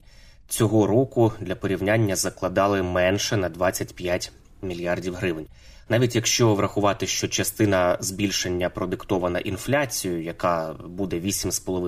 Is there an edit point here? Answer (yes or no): no